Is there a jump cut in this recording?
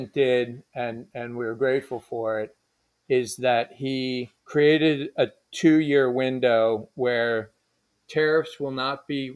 no; 0 cuts

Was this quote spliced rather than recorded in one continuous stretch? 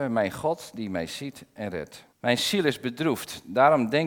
yes; 1 cut; at 2.1 s

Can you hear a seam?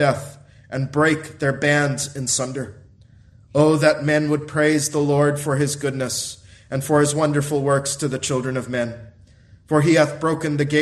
no; 0 cuts

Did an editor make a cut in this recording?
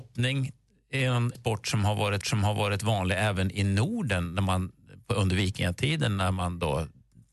yes; 2 cuts; at 1.3 s, 2.2 s

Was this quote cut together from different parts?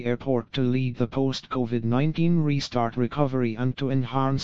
yes; 1 cut; at 3.0 s

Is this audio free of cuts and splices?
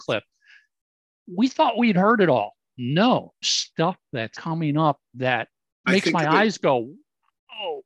no; 3 cuts; at 3.4 s, 4.3 s, 5.8 s

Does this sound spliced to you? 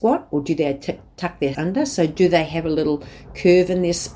yes; 1 cut; at 1.5 s

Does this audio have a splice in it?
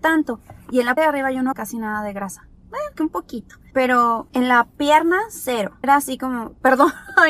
yes; 5 cuts; at 1.0 s, 1.5 s, 3.0 s, 4.7 s, 5.8 s

